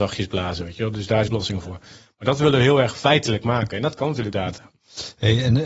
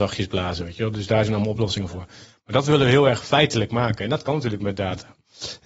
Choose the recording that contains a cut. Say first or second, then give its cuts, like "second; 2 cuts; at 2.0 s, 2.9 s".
first; 2 cuts; at 1.3 s, 4.3 s